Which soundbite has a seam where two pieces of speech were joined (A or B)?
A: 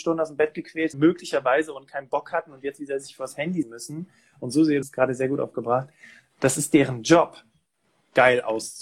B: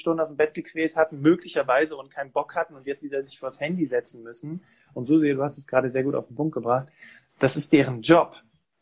A